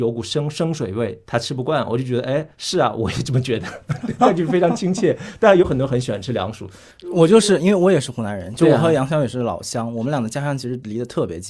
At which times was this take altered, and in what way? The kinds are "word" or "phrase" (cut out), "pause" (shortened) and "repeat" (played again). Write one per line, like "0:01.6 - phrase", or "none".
0:01.2 - pause
0:02.5 - pause